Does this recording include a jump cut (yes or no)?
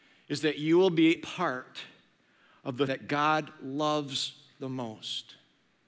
yes